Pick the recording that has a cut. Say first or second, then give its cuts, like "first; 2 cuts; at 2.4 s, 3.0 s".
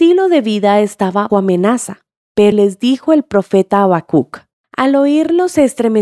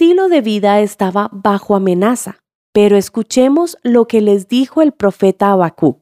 first; 3 cuts; at 1.3 s, 2.5 s, 4.5 s